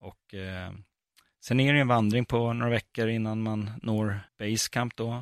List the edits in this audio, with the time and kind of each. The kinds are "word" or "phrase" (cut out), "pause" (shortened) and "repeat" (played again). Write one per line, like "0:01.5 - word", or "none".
0:04.3 - pause